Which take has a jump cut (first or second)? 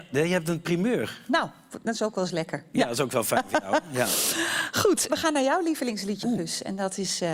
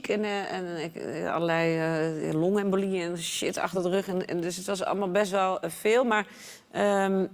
first